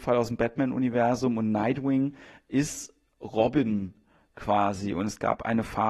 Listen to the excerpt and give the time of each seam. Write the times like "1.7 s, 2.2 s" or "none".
none